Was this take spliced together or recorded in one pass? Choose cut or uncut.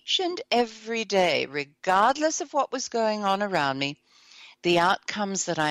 uncut